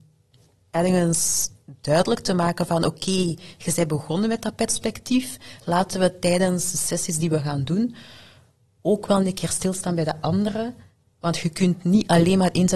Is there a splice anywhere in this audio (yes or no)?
no